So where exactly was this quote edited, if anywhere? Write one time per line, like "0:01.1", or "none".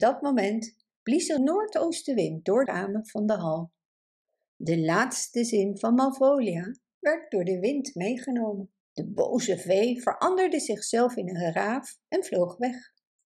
0:01.4
0:02.7
0:08.8